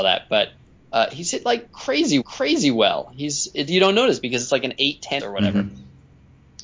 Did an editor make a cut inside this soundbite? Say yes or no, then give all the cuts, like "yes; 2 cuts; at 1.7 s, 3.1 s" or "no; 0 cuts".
yes; 3 cuts; at 2.2 s, 3.7 s, 5.2 s